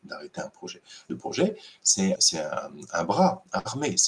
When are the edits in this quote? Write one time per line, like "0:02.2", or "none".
0:01.1
0:02.2